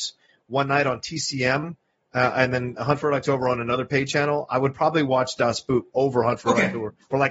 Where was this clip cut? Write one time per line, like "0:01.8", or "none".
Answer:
none